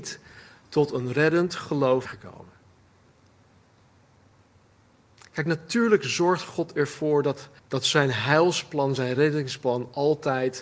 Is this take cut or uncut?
cut